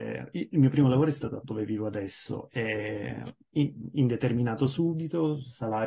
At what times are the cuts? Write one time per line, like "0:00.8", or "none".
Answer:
0:01.4